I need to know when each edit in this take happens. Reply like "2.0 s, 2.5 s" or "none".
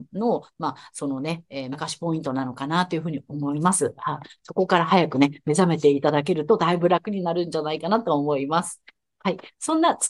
1.7 s